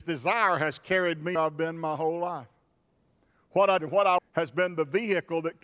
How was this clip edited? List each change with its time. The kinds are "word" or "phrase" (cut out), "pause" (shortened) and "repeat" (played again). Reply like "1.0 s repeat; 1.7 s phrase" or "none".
1.4 s word; 3.8 s word; 4.2 s word